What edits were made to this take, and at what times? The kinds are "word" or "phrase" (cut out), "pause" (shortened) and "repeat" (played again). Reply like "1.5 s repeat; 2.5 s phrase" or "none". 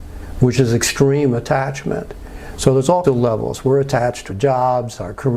3.0 s word; 4.3 s phrase

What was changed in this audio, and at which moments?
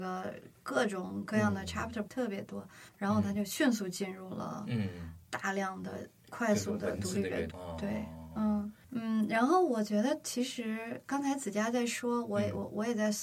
2.1 s word; 2.9 s pause; 7.5 s word

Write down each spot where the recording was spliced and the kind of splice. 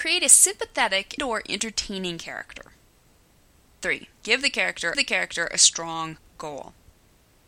1.2 s word; 4.2 s pause; 4.9 s repeat

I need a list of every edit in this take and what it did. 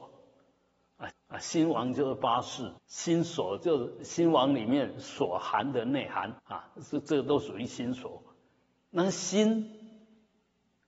1.1 s repeat; 2.8 s pause; 6.4 s pause

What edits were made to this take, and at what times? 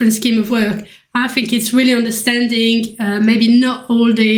none

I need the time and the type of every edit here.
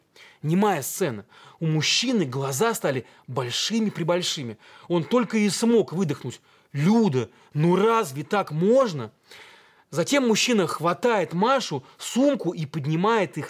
none

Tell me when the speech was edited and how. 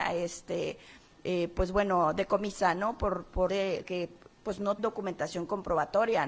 3.5 s phrase; 3.8 s word; 4.8 s word

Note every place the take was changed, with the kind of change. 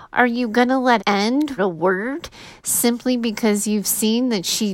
1.0 s word; 1.6 s word

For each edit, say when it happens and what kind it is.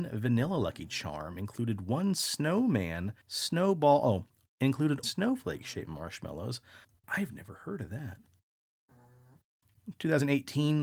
3.2 s pause; 5.0 s phrase; 6.8 s pause

